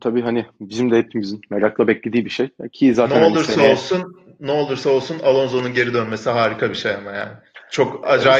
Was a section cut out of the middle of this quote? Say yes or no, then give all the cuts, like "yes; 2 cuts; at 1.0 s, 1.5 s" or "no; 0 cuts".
no; 0 cuts